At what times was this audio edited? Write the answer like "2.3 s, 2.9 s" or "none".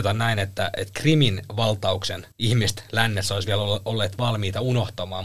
2.3 s